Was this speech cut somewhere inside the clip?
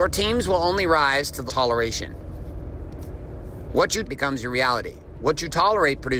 yes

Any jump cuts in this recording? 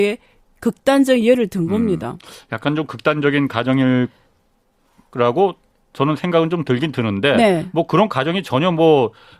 no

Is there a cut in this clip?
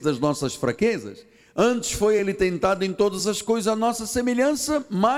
no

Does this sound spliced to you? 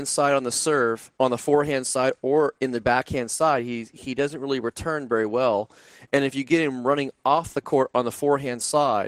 yes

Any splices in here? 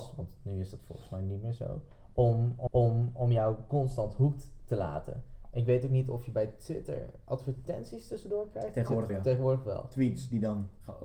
yes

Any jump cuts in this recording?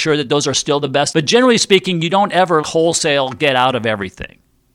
yes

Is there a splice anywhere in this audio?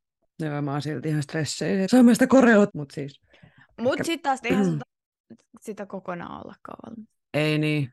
yes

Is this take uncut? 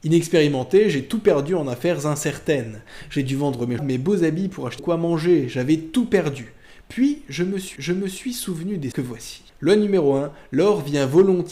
no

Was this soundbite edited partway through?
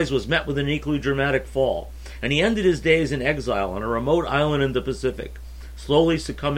no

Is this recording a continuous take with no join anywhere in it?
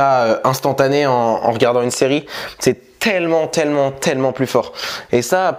yes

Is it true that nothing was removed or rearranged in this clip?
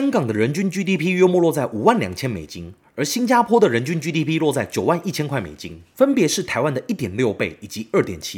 yes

